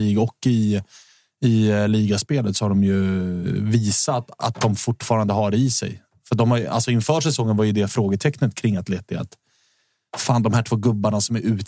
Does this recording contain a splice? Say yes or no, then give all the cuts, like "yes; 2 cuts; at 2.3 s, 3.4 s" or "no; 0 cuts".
no; 0 cuts